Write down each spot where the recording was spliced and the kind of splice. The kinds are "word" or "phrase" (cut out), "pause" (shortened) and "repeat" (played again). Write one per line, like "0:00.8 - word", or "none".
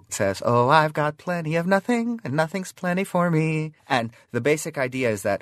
0:03.8 - pause